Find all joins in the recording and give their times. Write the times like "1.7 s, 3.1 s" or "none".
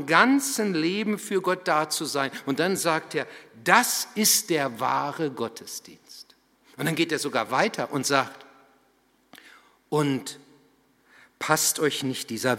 none